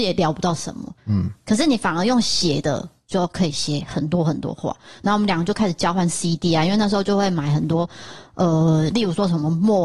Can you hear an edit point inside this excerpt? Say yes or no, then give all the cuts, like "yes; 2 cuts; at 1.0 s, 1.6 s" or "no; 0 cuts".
no; 0 cuts